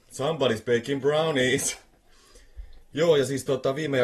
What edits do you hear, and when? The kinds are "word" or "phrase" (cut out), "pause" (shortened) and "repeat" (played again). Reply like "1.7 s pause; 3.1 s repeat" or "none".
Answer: 2.8 s pause